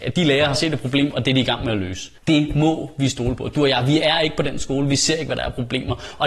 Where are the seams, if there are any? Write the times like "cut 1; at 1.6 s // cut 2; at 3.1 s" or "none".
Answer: cut 1; at 2.2 s